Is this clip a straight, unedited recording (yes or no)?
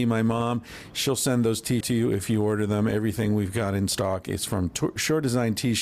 no